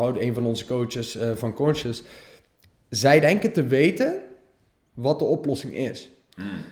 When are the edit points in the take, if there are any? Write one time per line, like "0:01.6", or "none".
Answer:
none